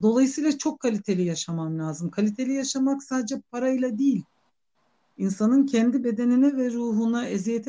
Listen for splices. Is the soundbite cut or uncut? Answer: uncut